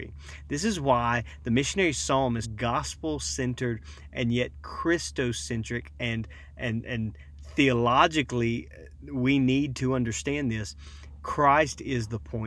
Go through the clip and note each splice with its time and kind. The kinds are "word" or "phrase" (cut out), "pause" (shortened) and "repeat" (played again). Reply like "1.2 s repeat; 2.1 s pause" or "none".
2.4 s word